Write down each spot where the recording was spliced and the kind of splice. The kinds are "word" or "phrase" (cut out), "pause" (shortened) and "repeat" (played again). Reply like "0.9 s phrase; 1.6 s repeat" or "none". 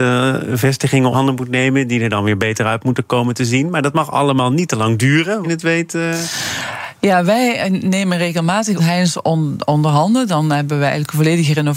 1.1 s word; 5.4 s phrase; 8.8 s phrase